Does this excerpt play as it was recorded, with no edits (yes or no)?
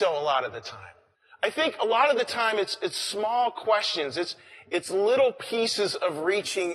no